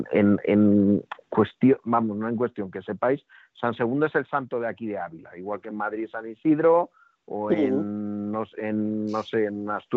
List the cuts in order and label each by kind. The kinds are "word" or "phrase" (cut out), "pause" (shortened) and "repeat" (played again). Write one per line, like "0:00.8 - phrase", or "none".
none